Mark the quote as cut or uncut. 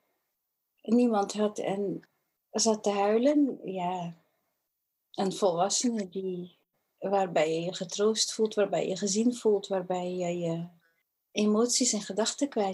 uncut